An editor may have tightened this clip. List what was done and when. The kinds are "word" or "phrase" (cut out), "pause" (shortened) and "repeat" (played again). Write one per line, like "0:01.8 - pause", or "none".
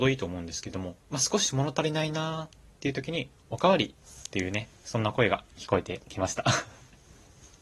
0:01.0 - pause
0:02.7 - pause